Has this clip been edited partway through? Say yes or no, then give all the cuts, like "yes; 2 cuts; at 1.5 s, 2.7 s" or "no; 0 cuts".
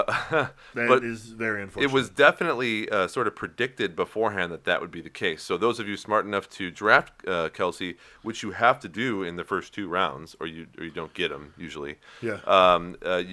no; 0 cuts